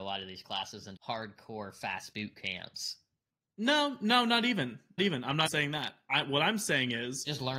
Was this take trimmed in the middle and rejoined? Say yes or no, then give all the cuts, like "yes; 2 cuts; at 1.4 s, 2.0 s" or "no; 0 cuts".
yes; 4 cuts; at 1.0 s, 2.1 s, 5.0 s, 5.5 s